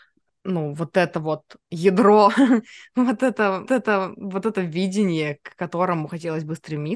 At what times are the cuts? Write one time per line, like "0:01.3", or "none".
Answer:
0:01.6
0:03.7